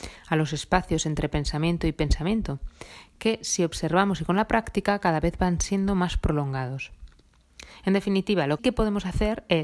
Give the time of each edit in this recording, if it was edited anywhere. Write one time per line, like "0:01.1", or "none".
0:08.6